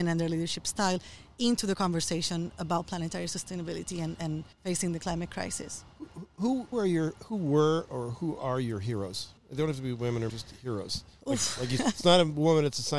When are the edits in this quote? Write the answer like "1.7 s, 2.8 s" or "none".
4.5 s, 6.7 s, 9.4 s, 10.3 s, 11.8 s